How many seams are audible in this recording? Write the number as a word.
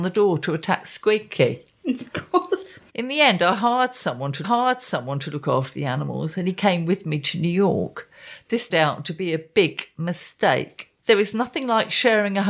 four